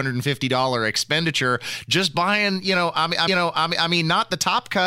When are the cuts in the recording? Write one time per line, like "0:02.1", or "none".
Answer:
0:03.3